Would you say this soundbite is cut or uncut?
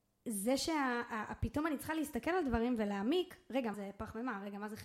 cut